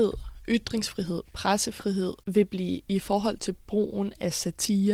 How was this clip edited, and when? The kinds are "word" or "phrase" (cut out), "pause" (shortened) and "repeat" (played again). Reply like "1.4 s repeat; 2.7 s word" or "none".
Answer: 2.2 s pause; 2.9 s word